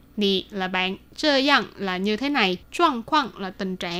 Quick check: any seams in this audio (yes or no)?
yes